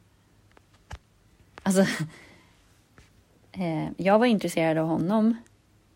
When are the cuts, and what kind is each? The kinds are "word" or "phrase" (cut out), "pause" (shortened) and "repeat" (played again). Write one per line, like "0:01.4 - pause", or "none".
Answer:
none